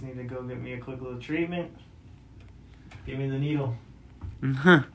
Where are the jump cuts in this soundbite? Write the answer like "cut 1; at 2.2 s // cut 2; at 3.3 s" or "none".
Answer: none